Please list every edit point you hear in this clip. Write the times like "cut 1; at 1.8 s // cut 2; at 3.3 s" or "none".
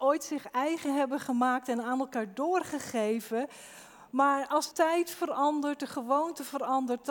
cut 1; at 4.7 s